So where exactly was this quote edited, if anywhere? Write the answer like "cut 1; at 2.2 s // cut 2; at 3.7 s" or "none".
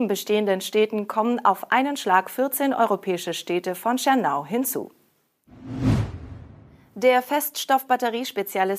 none